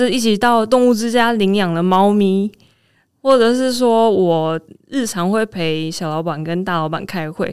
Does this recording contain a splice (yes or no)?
no